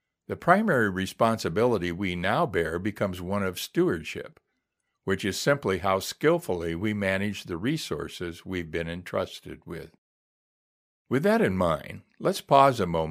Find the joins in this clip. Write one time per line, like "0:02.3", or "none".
none